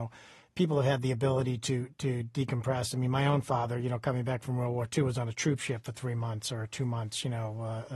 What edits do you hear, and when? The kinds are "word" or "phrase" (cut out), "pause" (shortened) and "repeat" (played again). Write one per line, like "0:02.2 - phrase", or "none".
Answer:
none